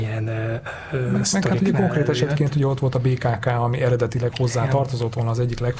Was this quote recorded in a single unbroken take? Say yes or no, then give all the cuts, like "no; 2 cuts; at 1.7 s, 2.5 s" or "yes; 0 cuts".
yes; 0 cuts